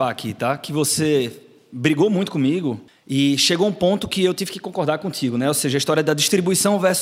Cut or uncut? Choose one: uncut